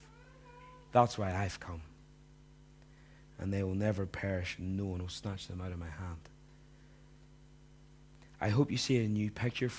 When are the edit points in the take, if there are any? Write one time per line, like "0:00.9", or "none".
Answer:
none